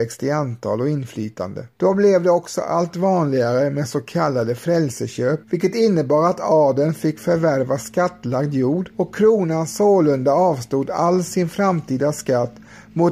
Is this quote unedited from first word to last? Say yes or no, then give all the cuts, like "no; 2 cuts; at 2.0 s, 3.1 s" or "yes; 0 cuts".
no; 3 cuts; at 1.7 s, 5.4 s, 8.9 s